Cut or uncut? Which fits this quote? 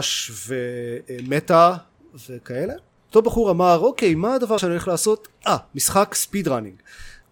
cut